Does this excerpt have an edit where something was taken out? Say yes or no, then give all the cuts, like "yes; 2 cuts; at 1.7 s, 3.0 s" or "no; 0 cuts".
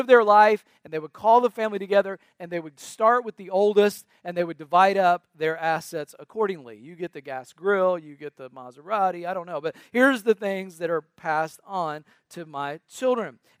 no; 0 cuts